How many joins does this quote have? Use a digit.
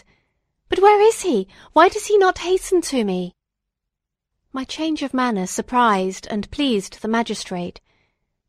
0